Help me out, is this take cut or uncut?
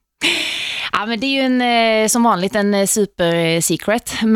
uncut